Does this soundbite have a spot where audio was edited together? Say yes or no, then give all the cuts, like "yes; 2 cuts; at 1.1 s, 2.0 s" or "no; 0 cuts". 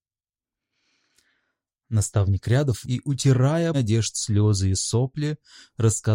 yes; 2 cuts; at 2.8 s, 3.7 s